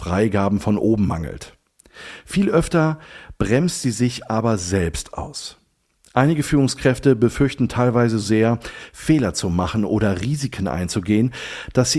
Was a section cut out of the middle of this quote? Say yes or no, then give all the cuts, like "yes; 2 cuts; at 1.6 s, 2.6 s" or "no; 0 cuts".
yes; 1 cut; at 8.2 s